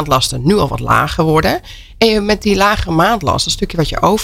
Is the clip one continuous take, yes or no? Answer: yes